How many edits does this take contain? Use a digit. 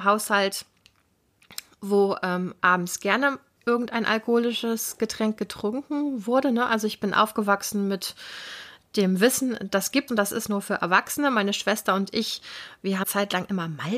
2